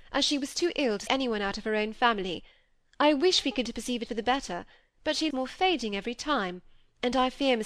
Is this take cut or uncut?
cut